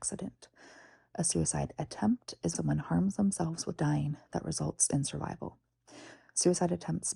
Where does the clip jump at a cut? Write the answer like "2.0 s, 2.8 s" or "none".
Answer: 2.5 s, 3.8 s